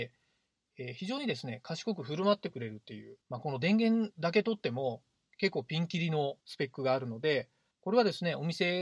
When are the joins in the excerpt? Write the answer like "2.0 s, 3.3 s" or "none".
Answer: 3.2 s, 6.4 s, 7.7 s